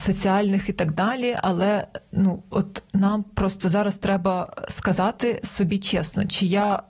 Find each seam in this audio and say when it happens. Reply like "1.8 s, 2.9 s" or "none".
none